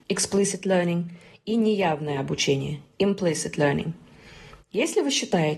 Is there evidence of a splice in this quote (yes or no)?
no